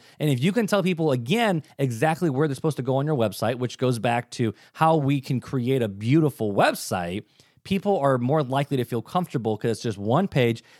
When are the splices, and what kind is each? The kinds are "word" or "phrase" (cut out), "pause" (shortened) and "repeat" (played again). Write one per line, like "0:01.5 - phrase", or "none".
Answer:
none